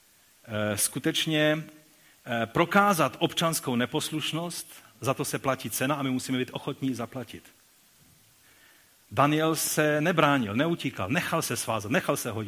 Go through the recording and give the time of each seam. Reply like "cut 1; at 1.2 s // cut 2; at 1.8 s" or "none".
none